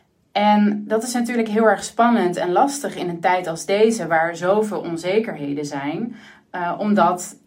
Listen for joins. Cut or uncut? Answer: uncut